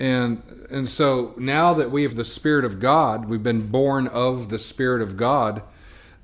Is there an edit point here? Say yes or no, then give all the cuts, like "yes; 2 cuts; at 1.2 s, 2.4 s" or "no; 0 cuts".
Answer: yes; 1 cut; at 2.1 s